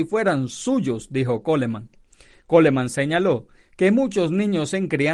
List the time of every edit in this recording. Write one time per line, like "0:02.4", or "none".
none